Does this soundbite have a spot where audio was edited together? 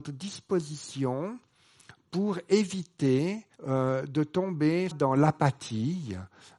yes; 2 cuts; at 3.6 s, 4.9 s

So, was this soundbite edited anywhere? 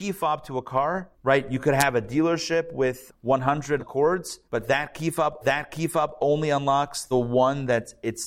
yes; 6 cuts; at 1.1 s, 3.1 s, 3.8 s, 4.4 s, 5.4 s, 7.1 s

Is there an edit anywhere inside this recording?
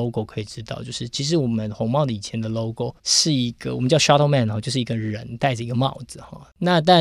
yes; 1 cut; at 3.0 s

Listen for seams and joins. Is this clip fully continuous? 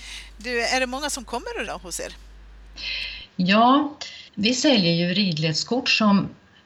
no; 2 cuts; at 1.7 s, 4.3 s

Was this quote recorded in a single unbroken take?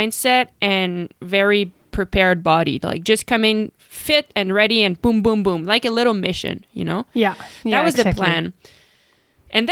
yes; 0 cuts

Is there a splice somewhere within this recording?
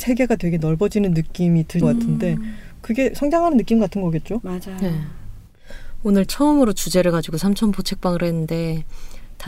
yes; 2 cuts; at 1.8 s, 6.3 s

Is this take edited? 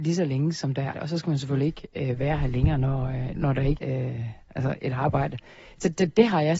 yes; 3 cuts; at 0.9 s, 3.4 s, 3.8 s

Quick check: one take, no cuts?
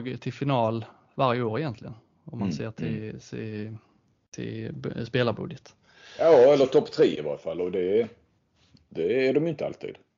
yes; 0 cuts

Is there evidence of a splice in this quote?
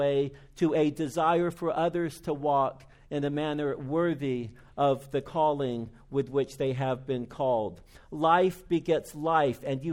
no; 0 cuts

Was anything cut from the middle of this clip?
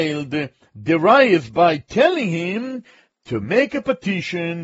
no; 0 cuts

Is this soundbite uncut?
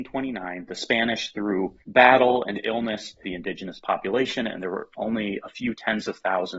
no; 2 cuts; at 1.8 s, 3.2 s

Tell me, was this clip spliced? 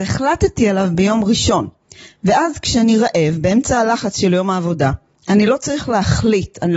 no; 0 cuts

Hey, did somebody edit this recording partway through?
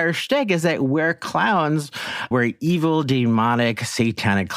yes; 1 cut; at 2.3 s

